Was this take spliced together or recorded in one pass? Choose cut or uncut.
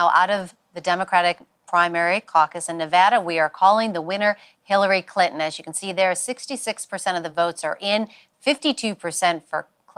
uncut